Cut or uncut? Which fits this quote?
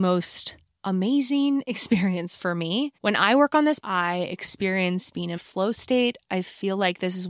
cut